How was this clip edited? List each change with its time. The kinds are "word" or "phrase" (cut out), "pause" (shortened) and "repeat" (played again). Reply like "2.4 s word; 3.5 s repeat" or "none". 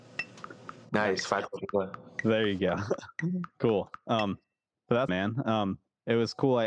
5.1 s word